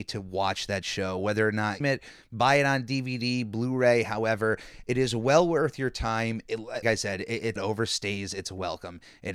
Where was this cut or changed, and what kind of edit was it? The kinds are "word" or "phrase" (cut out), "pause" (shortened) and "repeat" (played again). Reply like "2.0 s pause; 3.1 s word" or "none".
1.8 s phrase; 6.8 s word; 7.6 s phrase